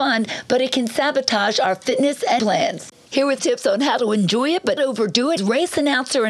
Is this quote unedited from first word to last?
no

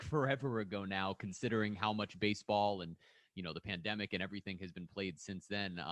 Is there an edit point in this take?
no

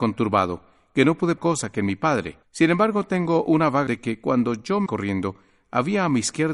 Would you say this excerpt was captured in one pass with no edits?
no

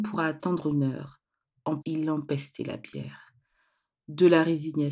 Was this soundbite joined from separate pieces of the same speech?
yes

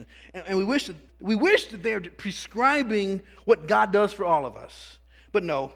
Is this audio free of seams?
no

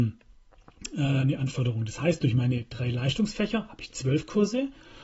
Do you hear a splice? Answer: no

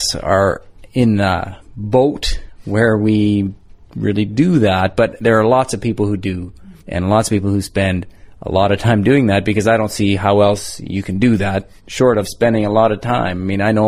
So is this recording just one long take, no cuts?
no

